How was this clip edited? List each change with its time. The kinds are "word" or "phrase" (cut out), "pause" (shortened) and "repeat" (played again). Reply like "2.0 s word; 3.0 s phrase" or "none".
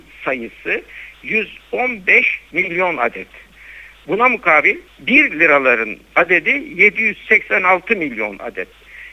none